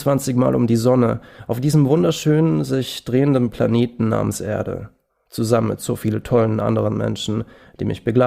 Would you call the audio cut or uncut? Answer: uncut